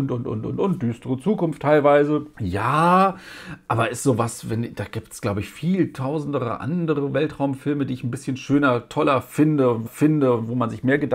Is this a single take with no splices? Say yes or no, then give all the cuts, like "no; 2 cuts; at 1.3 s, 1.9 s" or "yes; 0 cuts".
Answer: no; 2 cuts; at 2.3 s, 9.9 s